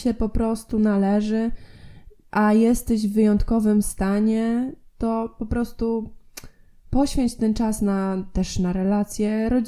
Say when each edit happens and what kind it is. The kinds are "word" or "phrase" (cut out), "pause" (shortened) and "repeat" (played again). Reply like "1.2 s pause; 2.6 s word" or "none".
none